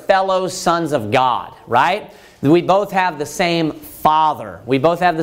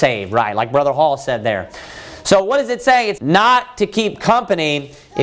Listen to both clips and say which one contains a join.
second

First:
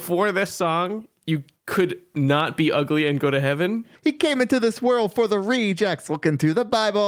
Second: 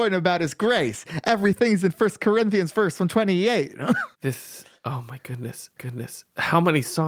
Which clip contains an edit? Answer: second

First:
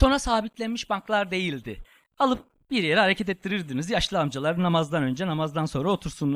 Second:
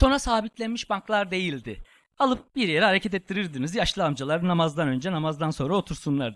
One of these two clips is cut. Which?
second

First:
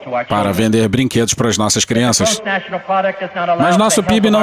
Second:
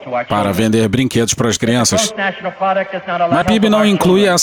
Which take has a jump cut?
second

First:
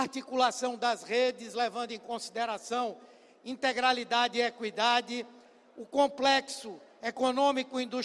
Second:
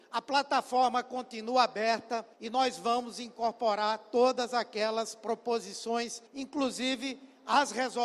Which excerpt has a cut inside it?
second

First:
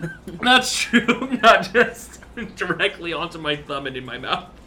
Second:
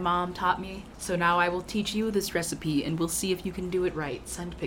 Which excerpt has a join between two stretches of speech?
second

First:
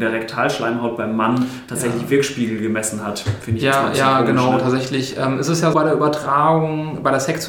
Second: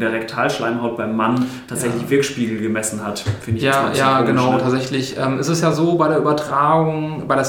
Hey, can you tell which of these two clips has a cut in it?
first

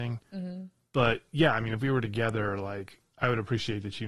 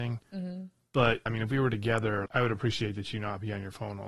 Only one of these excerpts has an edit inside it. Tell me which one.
second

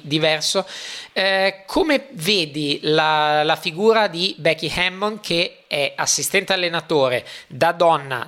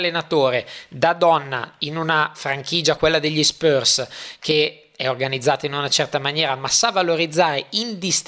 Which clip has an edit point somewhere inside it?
second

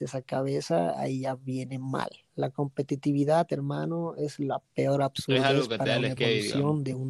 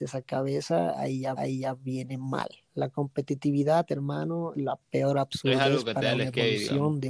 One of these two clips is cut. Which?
second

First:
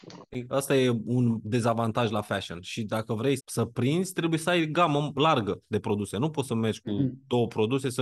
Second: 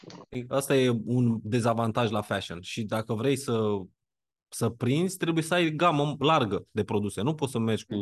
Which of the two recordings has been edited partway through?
first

